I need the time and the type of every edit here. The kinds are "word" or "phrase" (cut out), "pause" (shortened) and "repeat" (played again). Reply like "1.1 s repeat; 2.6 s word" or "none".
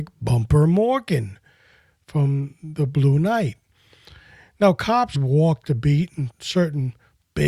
5.1 s word; 6.3 s word